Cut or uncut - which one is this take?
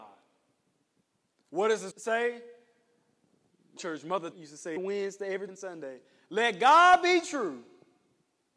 cut